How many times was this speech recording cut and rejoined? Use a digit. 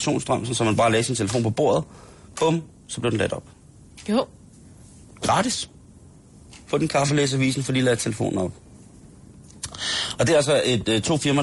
0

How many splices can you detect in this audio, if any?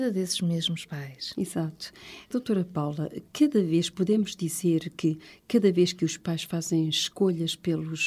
0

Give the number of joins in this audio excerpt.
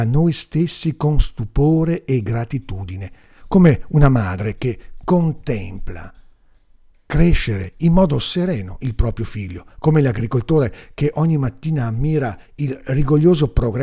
1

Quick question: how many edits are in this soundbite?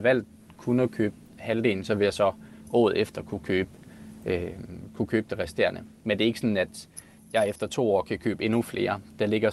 0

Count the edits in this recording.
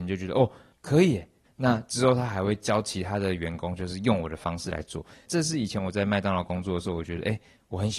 0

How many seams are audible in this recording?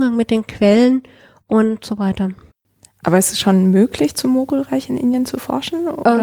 0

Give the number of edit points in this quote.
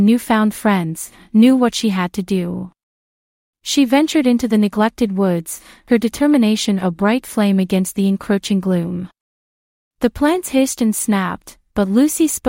0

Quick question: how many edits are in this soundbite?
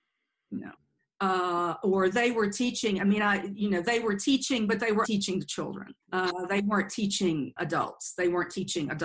3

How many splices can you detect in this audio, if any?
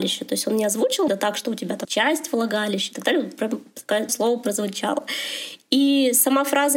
3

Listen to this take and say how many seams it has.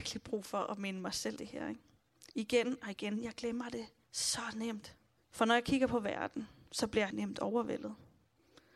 5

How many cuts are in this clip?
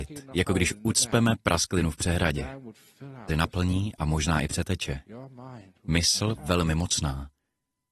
2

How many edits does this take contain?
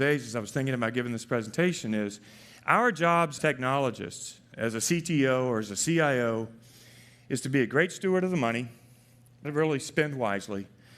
2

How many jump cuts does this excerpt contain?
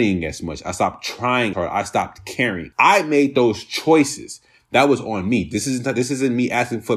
2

